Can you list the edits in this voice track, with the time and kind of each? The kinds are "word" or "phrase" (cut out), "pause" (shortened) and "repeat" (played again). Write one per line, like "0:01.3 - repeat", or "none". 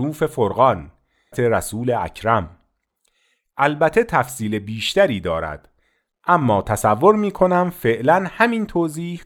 0:01.3 - phrase